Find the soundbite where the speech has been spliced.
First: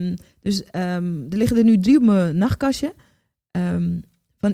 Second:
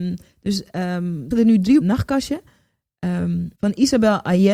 second; 3 cuts; at 1.3 s, 1.8 s, 3.5 s

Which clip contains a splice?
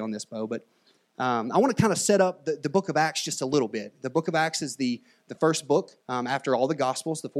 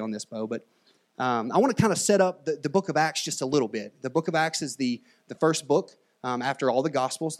first; 1 cut; at 6.0 s

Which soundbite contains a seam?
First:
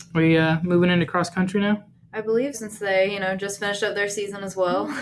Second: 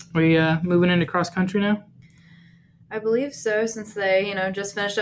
first; 2 cuts; at 1.9 s, 2.5 s

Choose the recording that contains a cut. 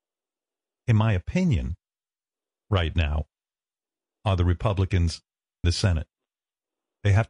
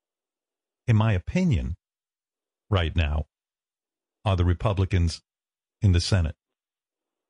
first; 1 cut; at 5.6 s

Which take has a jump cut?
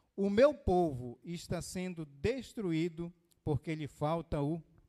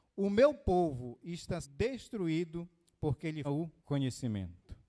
second; 3 cuts; at 1.6 s, 3.4 s, 3.8 s

